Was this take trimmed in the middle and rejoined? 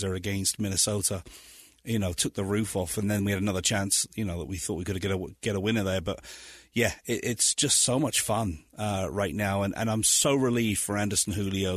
no; 0 cuts

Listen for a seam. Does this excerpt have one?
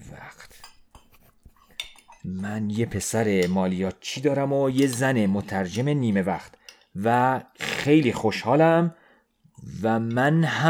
no; 0 cuts

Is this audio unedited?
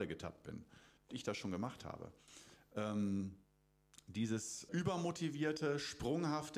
no; 2 cuts; at 1.1 s, 4.7 s

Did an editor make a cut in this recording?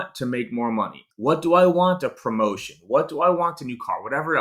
yes; 1 cut; at 1.1 s

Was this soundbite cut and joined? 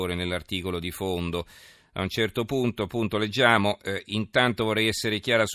no; 0 cuts

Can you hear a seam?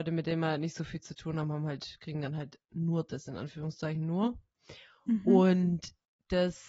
no; 0 cuts

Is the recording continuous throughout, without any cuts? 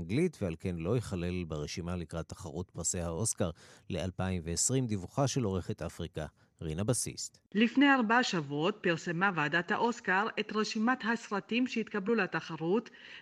yes; 0 cuts

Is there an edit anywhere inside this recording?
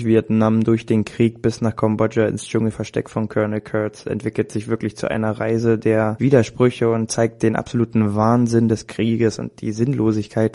no; 0 cuts

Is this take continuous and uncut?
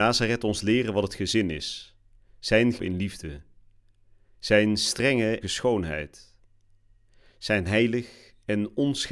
no; 2 cuts; at 2.8 s, 5.4 s

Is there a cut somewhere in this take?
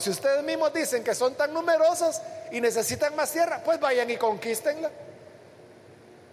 no; 0 cuts

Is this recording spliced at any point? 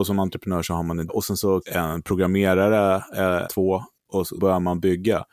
yes; 4 cuts; at 1.1 s, 1.6 s, 3.4 s, 4.4 s

